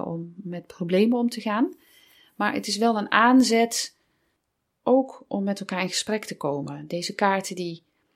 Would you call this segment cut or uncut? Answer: uncut